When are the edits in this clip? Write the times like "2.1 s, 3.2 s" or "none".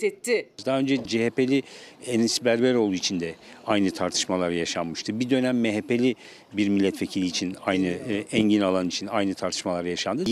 none